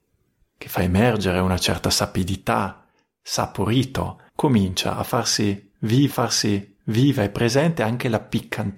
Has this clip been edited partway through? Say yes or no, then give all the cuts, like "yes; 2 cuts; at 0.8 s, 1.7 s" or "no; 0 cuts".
yes; 2 cuts; at 4.3 s, 6.1 s